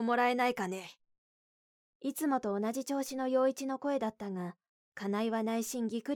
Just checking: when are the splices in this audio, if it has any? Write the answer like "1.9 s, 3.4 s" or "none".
none